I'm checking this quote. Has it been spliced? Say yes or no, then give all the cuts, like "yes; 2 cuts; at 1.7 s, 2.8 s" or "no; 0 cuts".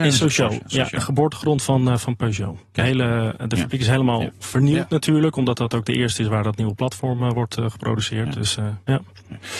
no; 0 cuts